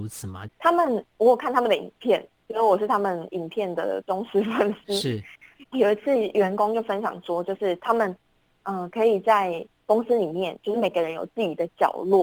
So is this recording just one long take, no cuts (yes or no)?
yes